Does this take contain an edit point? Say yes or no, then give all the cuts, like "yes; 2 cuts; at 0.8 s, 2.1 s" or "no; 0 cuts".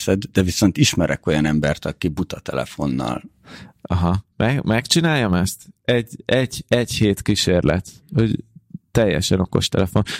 yes; 1 cut; at 4.3 s